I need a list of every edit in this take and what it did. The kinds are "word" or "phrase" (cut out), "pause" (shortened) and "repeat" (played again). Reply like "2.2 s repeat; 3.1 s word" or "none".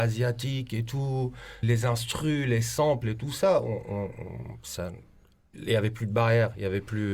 1.6 s word; 5.5 s word